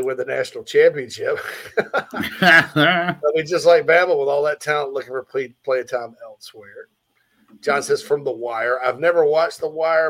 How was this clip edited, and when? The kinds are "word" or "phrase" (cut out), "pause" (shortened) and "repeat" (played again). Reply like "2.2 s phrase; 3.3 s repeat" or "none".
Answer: none